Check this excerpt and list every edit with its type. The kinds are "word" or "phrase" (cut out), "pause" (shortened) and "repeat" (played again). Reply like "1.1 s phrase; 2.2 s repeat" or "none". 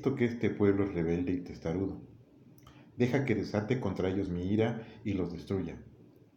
none